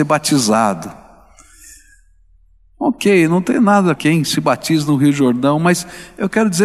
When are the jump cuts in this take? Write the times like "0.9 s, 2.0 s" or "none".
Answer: 3.9 s